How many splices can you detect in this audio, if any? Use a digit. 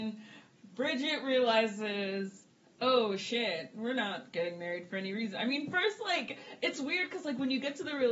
0